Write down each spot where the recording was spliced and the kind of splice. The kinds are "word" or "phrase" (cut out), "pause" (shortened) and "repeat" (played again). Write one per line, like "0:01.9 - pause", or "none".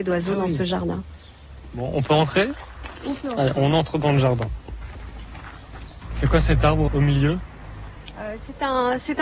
0:06.9 - word